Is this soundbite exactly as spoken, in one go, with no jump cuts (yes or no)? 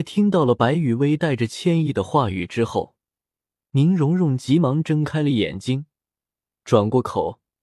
yes